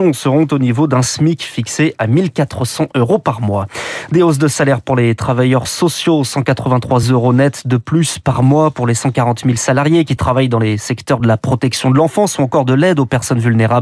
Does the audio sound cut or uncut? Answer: uncut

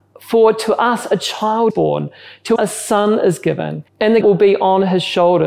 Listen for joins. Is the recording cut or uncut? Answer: cut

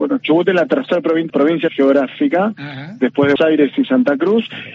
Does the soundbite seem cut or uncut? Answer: cut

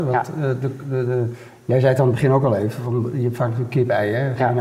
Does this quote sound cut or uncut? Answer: uncut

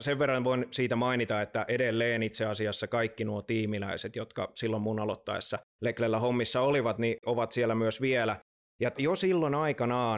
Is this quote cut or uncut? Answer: cut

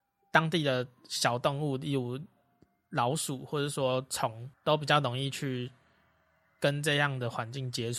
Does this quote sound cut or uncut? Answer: cut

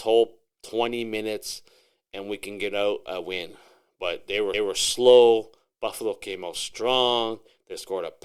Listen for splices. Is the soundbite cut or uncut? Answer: cut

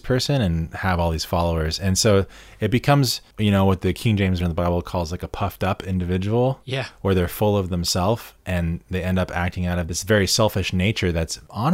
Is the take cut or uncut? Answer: cut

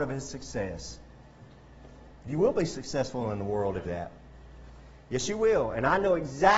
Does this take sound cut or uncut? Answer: cut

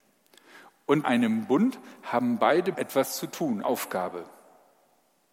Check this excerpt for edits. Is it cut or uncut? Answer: cut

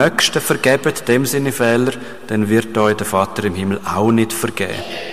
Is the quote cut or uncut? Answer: uncut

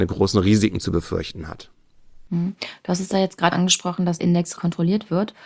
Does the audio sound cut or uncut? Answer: cut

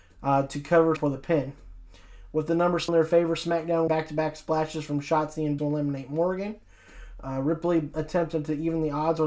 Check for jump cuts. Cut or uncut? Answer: cut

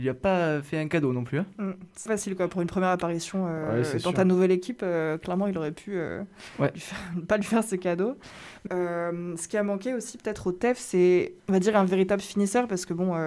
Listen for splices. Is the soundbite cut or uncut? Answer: cut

